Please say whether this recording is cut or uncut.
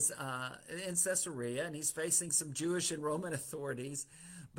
uncut